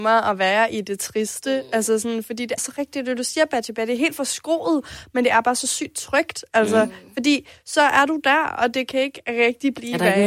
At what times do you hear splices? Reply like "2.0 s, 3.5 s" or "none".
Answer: 2.6 s

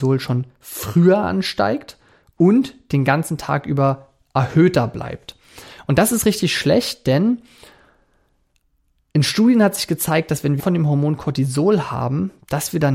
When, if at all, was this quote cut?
10.6 s

